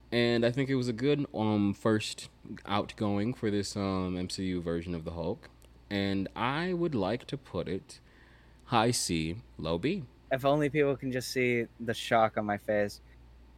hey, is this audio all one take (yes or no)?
yes